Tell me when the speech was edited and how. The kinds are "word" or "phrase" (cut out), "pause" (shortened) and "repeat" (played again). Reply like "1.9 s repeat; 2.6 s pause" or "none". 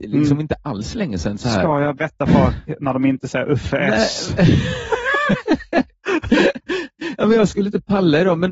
2.0 s word